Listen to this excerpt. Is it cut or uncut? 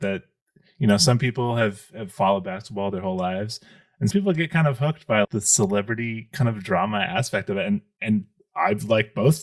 cut